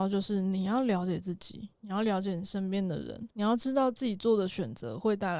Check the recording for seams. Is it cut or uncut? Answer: cut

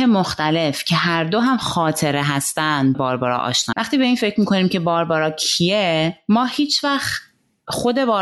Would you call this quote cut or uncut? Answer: cut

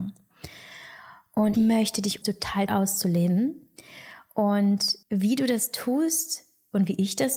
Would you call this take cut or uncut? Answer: cut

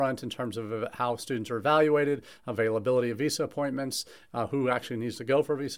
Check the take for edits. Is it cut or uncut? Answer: uncut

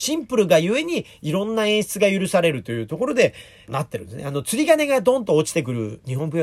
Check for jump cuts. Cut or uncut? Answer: cut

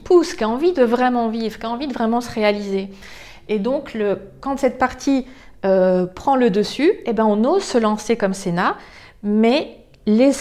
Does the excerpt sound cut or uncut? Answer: uncut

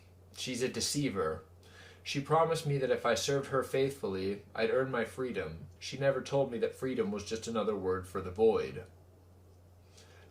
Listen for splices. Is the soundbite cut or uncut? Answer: cut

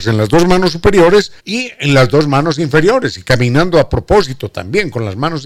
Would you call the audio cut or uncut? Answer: cut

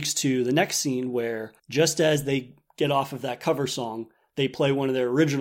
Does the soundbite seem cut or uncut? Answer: cut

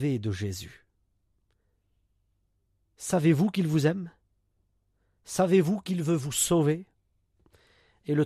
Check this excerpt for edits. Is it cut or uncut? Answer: uncut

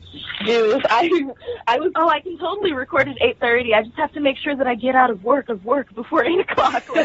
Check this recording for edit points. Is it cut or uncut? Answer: cut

